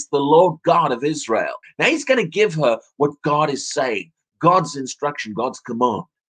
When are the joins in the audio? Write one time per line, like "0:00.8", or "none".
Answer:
0:01.6